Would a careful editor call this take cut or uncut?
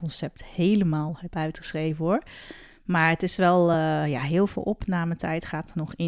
uncut